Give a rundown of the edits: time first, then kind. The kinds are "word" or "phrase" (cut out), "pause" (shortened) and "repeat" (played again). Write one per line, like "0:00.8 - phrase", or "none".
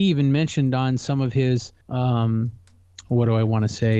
0:01.8 - pause